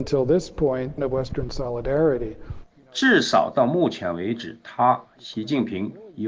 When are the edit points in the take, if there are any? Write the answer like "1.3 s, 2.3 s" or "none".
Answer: 1.0 s